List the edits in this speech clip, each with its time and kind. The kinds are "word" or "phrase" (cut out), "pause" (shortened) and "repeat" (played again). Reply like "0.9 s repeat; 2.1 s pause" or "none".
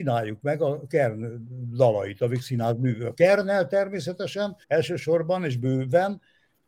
4.6 s pause